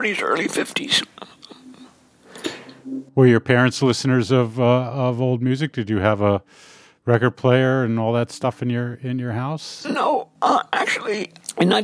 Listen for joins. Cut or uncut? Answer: uncut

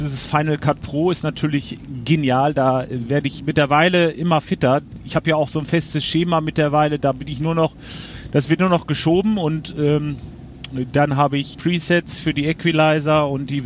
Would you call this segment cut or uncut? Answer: cut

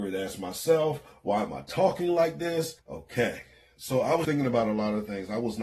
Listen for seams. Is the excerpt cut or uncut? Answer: cut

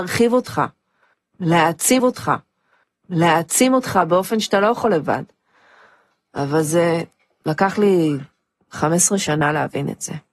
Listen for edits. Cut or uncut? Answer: cut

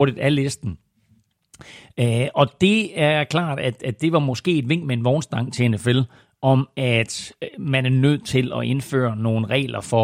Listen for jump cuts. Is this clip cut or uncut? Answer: uncut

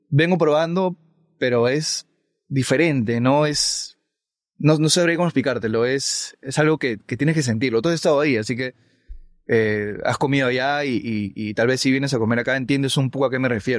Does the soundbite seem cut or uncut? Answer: uncut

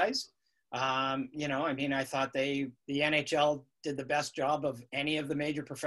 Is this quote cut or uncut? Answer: cut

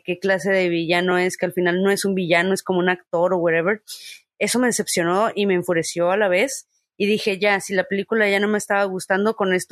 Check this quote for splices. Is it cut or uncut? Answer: uncut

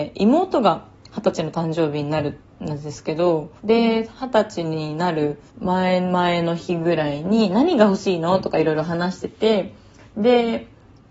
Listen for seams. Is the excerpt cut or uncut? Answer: cut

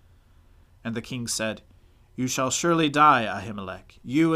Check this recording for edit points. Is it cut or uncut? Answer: uncut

